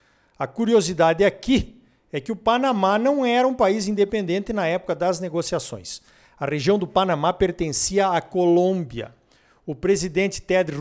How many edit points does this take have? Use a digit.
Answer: 0